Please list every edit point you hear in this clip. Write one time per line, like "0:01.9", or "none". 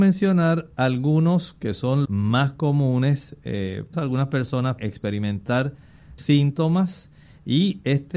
0:02.0
0:03.9
0:04.8
0:06.2

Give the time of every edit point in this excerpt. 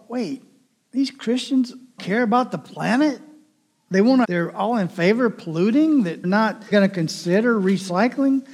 0:02.0
0:04.2
0:06.2
0:06.7

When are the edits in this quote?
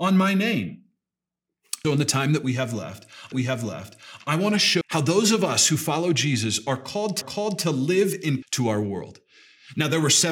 0:01.8
0:03.3
0:04.8
0:07.2
0:08.4

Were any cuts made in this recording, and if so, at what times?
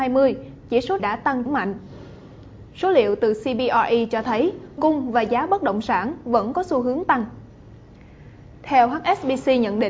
0:01.0
0:01.5
0:04.8

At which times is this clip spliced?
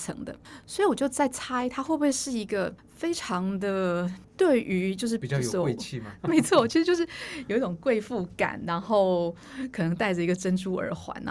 0:06.2

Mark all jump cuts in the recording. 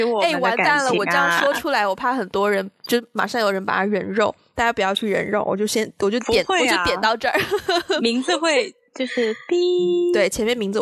none

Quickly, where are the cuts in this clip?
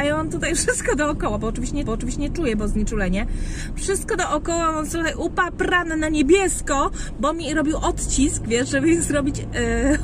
0:01.9

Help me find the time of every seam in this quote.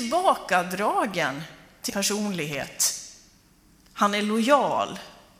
0:01.9

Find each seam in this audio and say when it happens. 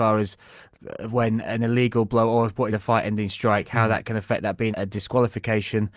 0:02.7
0:04.7

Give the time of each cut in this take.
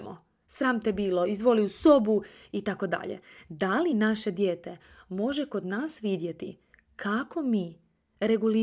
none

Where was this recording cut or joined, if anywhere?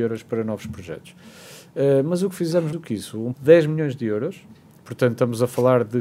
0:02.7
0:03.3

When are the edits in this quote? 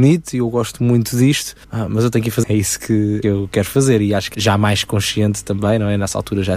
0:01.6
0:02.4
0:03.2
0:04.3

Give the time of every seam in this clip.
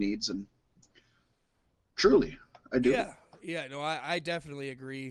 none

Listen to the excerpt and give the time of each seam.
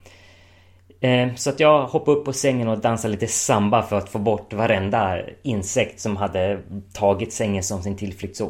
none

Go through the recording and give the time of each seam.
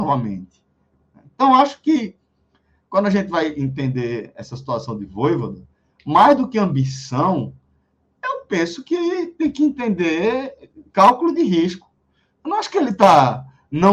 none

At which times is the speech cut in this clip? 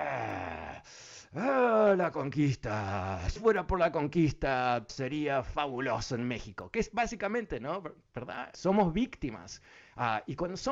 0:03.4
0:04.9
0:08.5

